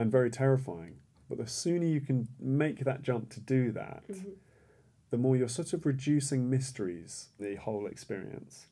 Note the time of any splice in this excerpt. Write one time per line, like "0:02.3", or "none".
0:07.4